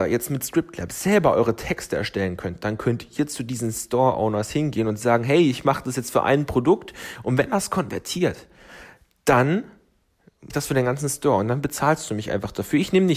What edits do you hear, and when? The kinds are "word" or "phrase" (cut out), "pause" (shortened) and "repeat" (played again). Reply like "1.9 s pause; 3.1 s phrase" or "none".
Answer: 10.5 s word

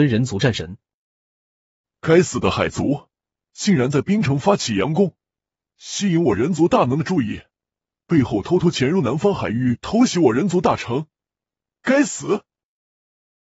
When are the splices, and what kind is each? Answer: none

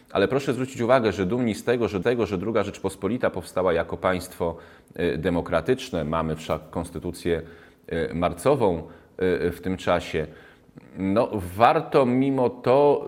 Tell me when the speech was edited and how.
2.0 s repeat

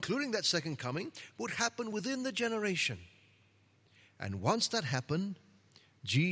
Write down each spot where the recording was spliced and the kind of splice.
none

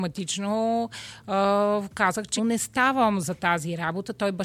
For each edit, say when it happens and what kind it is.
2.4 s word

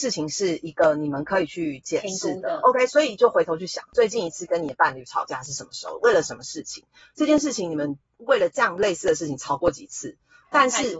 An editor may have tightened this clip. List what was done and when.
none

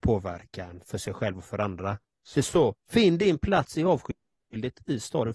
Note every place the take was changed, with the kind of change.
2.3 s phrase

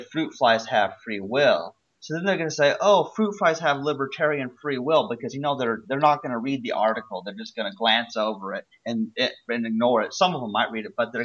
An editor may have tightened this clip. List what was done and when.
none

